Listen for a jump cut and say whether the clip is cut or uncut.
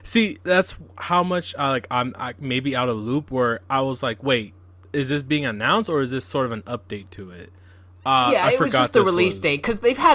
uncut